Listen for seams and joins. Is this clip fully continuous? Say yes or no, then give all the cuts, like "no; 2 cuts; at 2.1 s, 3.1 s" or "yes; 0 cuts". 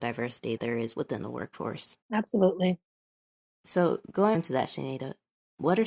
no; 2 cuts; at 2.0 s, 4.3 s